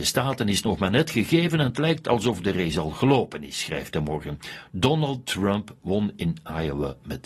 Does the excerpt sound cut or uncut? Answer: uncut